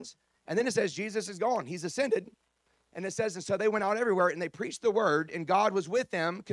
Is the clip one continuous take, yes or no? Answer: yes